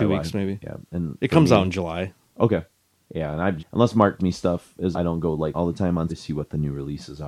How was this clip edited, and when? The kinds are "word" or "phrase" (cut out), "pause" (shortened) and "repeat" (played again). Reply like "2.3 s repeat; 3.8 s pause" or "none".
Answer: 1.2 s word; 3.6 s word; 4.2 s word; 4.9 s word; 5.5 s word; 6.1 s word